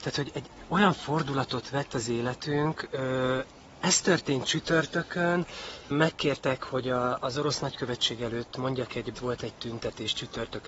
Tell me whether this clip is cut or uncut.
cut